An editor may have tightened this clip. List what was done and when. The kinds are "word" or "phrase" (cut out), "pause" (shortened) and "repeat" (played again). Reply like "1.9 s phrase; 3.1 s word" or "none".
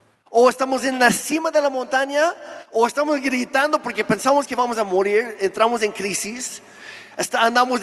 none